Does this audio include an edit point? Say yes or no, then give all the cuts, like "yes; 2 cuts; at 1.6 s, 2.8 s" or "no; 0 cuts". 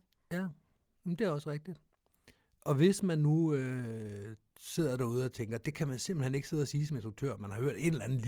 no; 0 cuts